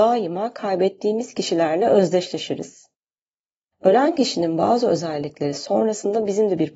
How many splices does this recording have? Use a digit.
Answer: 0